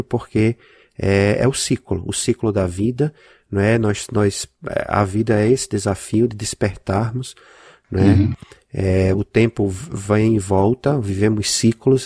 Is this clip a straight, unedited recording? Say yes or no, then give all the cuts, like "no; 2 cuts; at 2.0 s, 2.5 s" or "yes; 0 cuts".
yes; 0 cuts